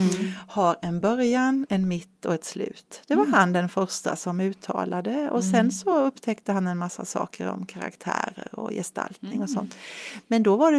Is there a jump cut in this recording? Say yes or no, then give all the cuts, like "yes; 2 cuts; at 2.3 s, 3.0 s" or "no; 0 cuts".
no; 0 cuts